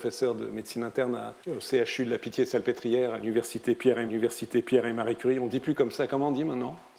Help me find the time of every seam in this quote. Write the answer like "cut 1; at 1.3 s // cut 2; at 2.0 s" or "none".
cut 1; at 1.4 s // cut 2; at 4.1 s